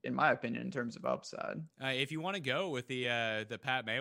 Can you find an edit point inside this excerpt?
no; 0 cuts

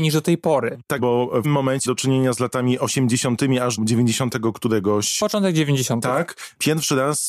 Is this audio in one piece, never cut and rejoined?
no; 4 cuts; at 1.0 s, 1.4 s, 1.9 s, 3.8 s

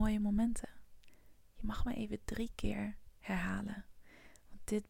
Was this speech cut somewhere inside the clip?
no; 0 cuts

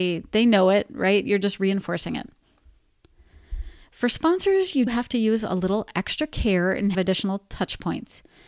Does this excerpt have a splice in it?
yes; 2 cuts; at 4.9 s, 6.9 s

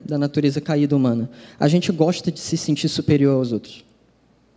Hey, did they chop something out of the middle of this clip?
no; 0 cuts

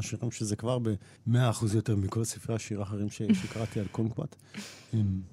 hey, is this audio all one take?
no; 1 cut; at 1.2 s

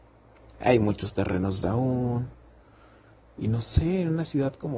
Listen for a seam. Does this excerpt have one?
yes; 1 cut; at 1.6 s

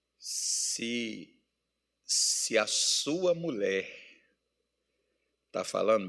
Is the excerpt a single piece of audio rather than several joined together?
yes; 0 cuts

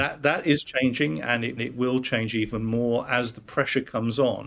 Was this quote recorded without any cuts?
no; 1 cut; at 1.6 s

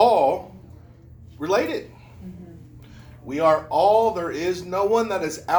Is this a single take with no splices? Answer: yes; 0 cuts

